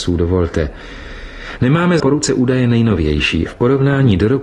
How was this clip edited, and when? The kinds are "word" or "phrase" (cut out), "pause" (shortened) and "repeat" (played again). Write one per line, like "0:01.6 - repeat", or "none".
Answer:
0:02.0 - word
0:03.5 - word